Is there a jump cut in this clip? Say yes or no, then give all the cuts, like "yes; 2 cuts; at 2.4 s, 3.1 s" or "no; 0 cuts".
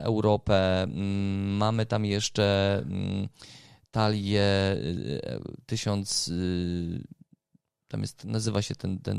no; 0 cuts